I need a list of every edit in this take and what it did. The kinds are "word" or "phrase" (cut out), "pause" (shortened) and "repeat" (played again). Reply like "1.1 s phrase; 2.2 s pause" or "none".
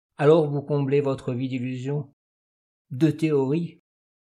none